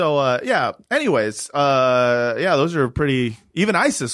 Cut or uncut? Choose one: uncut